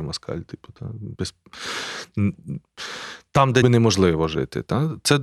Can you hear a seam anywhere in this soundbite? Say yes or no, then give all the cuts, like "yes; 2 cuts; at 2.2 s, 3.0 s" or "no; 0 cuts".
yes; 2 cuts; at 1.2 s, 3.6 s